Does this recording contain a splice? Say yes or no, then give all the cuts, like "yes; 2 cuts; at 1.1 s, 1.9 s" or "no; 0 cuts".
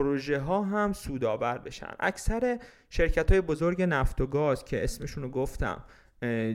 no; 0 cuts